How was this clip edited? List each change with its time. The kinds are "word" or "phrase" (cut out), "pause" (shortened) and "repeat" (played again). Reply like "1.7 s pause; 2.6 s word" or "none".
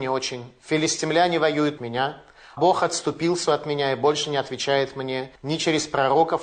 1.8 s word; 2.6 s word; 5.4 s pause

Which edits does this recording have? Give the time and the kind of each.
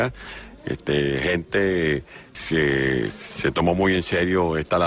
2.3 s word

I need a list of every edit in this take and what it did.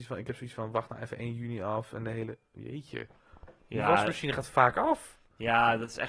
none

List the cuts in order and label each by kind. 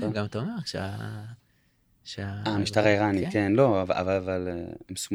none

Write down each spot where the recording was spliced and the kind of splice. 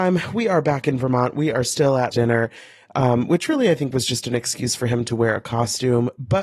2.1 s phrase

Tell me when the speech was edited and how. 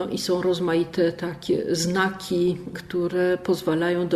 none

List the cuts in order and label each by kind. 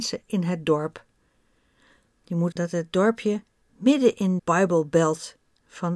2.5 s word; 4.4 s word

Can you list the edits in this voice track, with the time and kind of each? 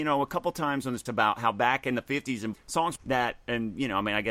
1.1 s word; 2.5 s word; 3.0 s phrase

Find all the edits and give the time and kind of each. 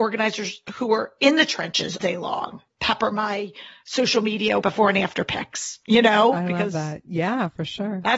2.0 s word; 2.7 s word; 4.6 s phrase

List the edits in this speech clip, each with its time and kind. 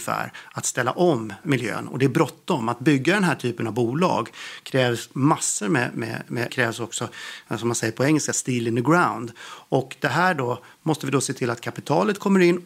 1.4 s word; 6.5 s phrase

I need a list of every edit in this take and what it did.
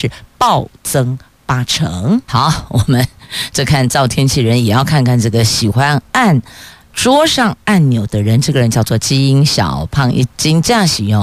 2.2 s pause

